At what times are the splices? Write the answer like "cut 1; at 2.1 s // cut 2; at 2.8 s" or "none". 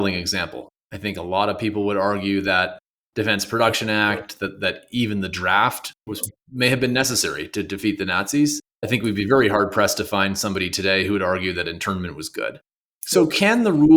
none

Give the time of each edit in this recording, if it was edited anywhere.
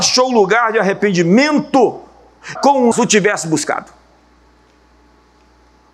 cut 1; at 2.6 s // cut 2; at 2.9 s

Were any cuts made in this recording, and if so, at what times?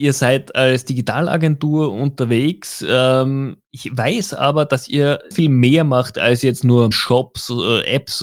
cut 1; at 5.3 s // cut 2; at 6.9 s

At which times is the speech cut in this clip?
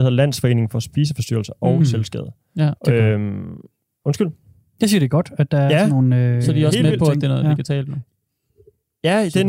none

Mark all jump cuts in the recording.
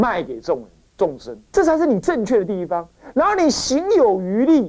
cut 1; at 1.5 s

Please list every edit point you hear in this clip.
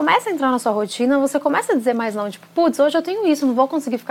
none

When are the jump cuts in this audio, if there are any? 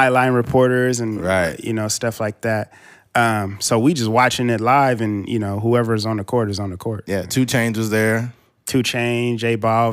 none

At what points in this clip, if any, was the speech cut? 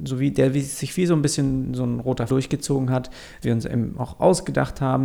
cut 1; at 2.3 s // cut 2; at 3.4 s

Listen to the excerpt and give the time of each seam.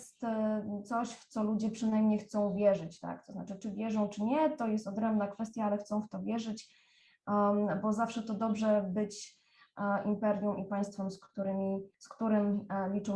cut 1; at 11.9 s

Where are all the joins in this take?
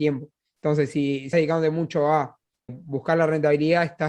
cut 1; at 1.3 s // cut 2; at 2.7 s

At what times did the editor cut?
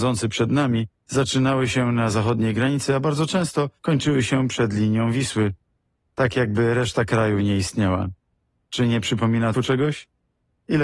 cut 1; at 3.8 s // cut 2; at 9.5 s

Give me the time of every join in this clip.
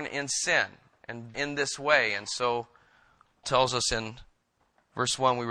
cut 1; at 1.3 s // cut 2; at 3.4 s

